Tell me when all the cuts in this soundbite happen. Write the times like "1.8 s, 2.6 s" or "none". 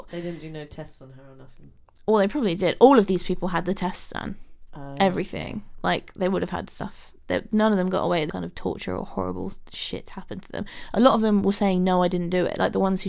8.3 s